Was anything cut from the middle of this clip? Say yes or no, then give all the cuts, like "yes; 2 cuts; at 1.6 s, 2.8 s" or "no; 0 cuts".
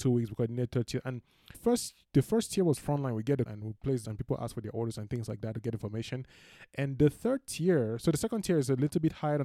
yes; 3 cuts; at 1.5 s, 3.5 s, 4.0 s